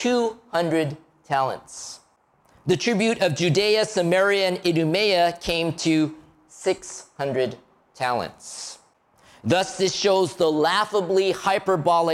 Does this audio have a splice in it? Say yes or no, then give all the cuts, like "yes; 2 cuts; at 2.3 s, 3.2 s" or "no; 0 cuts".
no; 0 cuts